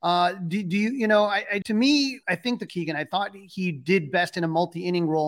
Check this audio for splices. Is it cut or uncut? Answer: cut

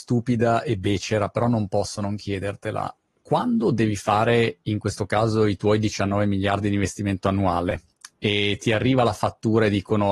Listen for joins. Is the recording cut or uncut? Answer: uncut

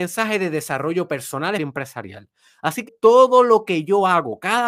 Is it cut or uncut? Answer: cut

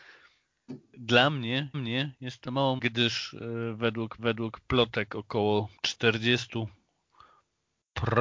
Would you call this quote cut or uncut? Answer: cut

